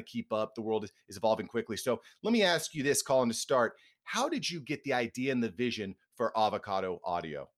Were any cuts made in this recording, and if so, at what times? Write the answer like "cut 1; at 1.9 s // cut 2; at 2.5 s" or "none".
none